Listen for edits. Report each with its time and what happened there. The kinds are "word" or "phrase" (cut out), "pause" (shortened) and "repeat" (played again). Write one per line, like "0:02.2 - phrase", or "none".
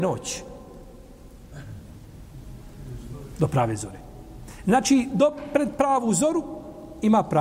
none